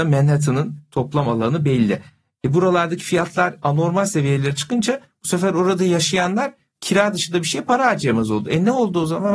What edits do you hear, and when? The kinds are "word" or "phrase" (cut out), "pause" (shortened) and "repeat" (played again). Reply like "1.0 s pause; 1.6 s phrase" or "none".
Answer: none